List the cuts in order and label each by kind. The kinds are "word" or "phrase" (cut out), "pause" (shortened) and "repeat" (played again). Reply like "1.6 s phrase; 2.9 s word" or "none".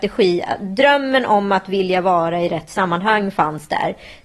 none